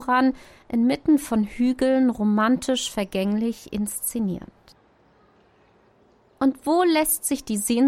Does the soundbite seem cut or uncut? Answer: uncut